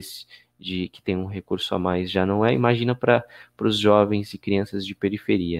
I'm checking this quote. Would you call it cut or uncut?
uncut